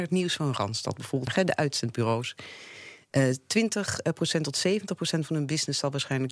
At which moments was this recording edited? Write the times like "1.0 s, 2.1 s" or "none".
none

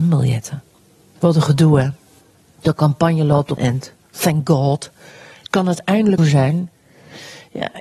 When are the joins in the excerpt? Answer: 3.6 s, 6.2 s

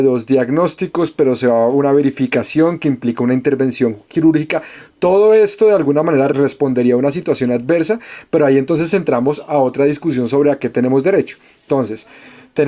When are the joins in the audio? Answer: none

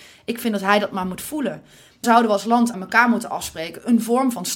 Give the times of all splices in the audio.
2.0 s, 2.7 s

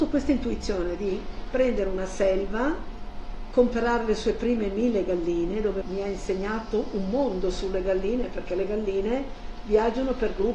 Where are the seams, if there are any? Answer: 5.8 s

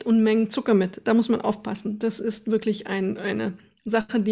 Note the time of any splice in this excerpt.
none

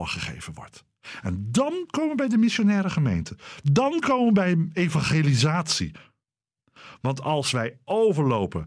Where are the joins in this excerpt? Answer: none

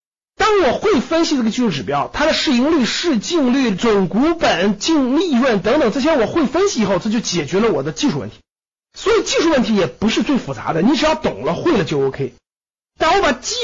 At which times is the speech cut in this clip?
none

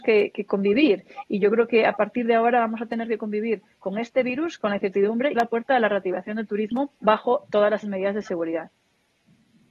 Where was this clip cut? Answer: 5.3 s, 7.0 s, 7.8 s

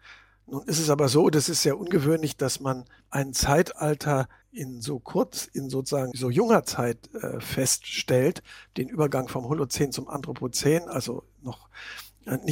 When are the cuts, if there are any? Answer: 6.1 s

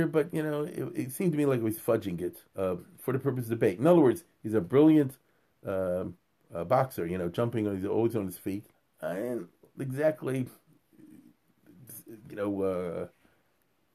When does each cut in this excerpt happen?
2.5 s, 8.7 s

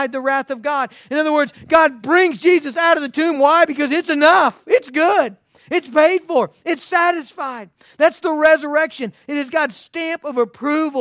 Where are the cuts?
none

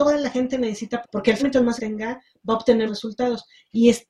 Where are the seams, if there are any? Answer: 1.0 s, 1.4 s, 1.8 s, 2.9 s

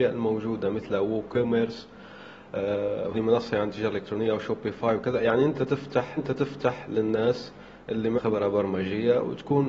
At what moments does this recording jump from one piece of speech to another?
3.1 s, 6.2 s, 8.2 s

